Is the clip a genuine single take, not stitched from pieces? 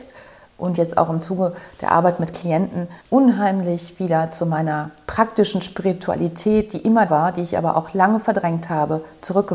no; 2 cuts; at 3.0 s, 7.1 s

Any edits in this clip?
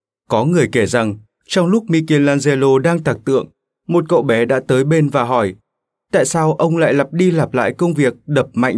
no; 0 cuts

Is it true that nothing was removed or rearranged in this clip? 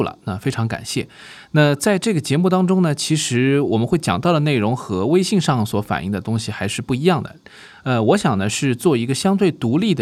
yes; 0 cuts

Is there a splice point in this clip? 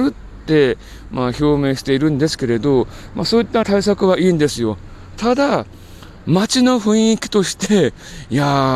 yes; 1 cut; at 3.6 s

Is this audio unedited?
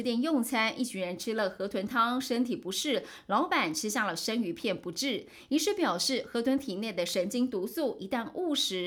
yes; 0 cuts

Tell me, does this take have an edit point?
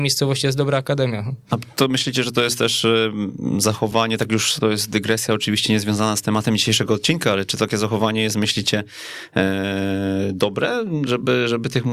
no; 0 cuts

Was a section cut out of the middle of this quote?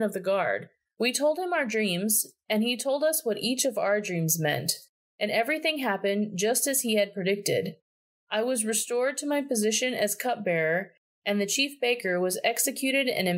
no; 0 cuts

